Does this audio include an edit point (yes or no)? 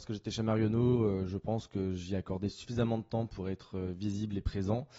no